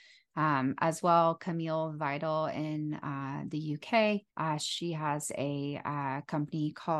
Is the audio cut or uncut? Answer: cut